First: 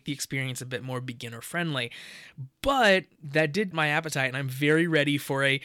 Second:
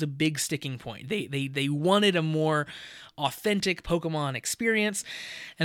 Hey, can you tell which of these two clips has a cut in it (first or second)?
first